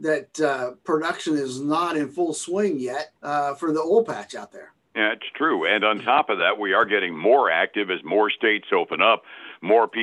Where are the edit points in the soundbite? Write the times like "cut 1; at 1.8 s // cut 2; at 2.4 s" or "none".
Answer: cut 1; at 3.2 s // cut 2; at 4.8 s